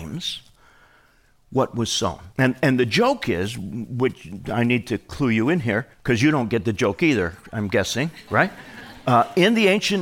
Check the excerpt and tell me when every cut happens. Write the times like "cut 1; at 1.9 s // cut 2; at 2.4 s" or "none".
cut 1; at 2.3 s // cut 2; at 5.9 s

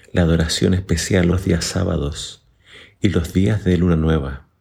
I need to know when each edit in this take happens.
cut 1; at 1.3 s

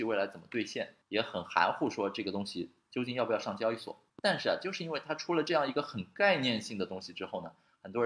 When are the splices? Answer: cut 1; at 1.0 s // cut 2; at 4.1 s

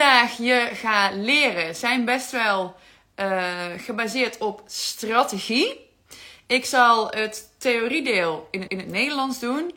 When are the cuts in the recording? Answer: cut 1; at 8.7 s

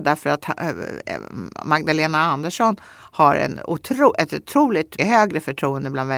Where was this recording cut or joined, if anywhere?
cut 1; at 5.0 s

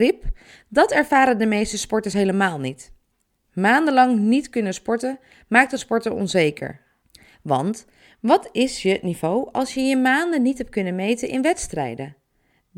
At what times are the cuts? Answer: none

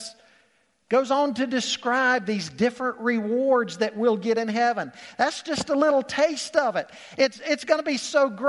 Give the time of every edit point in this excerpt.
none

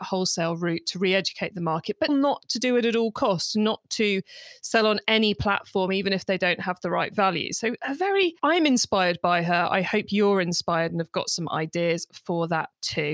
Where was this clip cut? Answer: cut 1; at 2.1 s // cut 2; at 8.4 s

